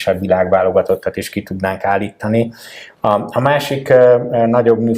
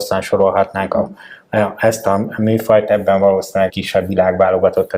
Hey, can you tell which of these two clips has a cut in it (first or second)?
second